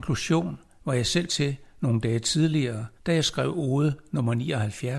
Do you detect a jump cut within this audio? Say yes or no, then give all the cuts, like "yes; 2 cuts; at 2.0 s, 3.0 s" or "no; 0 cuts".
yes; 2 cuts; at 1.3 s, 3.0 s